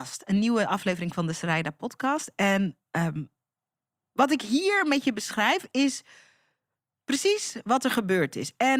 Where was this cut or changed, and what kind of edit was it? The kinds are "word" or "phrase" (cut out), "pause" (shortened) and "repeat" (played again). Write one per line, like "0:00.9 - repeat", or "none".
none

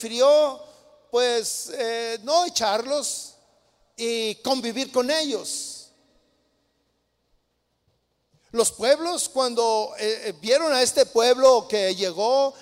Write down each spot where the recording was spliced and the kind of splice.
none

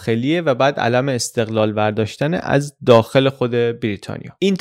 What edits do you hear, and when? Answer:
none

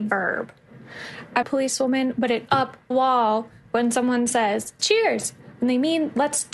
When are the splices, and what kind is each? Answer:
0:01.4 - phrase
0:02.5 - phrase
0:02.9 - word
0:04.8 - word

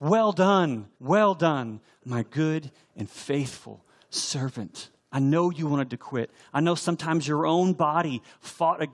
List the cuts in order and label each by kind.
0:00.9 - pause
0:05.0 - pause

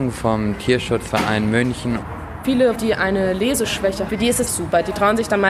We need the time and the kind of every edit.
0:02.7 - word
0:04.1 - word
0:04.5 - word

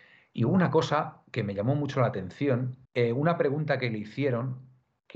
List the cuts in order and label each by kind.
0:02.8 - pause

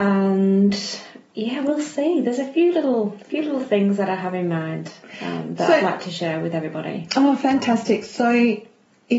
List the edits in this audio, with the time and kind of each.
none

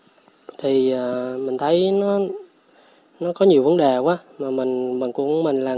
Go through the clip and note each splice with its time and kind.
none

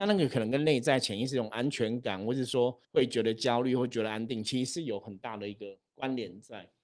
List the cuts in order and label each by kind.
0:02.8 - pause

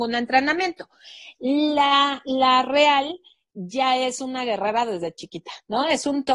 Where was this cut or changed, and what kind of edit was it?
none

